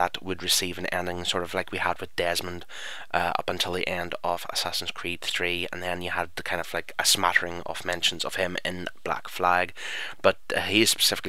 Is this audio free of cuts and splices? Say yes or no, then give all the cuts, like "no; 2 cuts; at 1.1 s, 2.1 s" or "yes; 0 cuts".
yes; 0 cuts